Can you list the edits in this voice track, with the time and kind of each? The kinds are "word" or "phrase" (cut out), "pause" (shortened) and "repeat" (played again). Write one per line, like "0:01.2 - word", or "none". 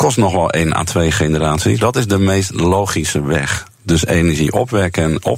0:01.8 - word